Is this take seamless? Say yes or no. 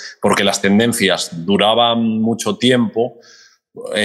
yes